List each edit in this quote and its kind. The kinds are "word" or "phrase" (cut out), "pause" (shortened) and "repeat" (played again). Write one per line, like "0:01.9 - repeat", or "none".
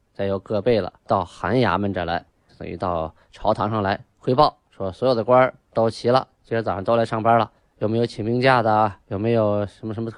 0:01.0 - pause
0:02.5 - word
0:07.6 - pause
0:09.0 - pause